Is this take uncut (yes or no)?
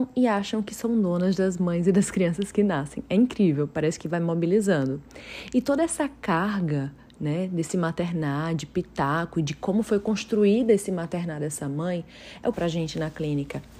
no